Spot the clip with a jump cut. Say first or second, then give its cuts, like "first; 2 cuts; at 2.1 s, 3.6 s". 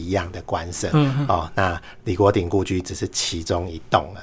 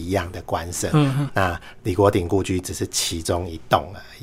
second; 1 cut; at 1.3 s